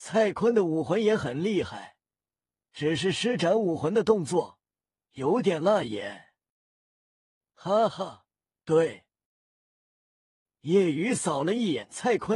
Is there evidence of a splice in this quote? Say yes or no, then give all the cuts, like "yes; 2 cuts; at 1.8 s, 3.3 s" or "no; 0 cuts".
no; 0 cuts